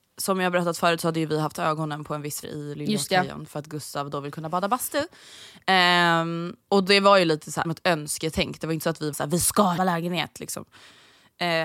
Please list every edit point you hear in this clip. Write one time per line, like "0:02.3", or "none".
0:02.4
0:06.6
0:07.6
0:09.1
0:09.8